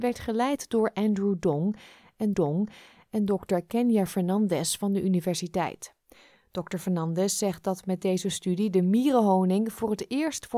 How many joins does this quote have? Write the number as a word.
one